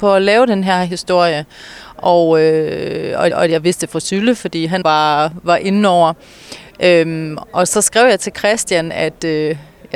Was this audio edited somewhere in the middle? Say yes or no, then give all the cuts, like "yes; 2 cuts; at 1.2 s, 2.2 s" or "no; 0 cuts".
yes; 2 cuts; at 3.3 s, 4.8 s